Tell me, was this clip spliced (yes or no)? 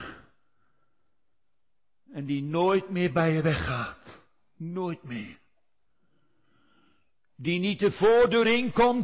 no